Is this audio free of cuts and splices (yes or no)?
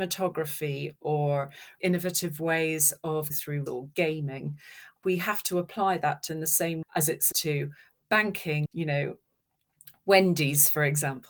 no